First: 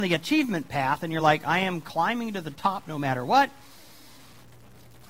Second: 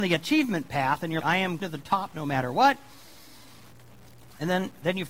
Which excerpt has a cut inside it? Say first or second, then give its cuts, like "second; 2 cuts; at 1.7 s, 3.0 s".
second; 2 cuts; at 1.2 s, 1.6 s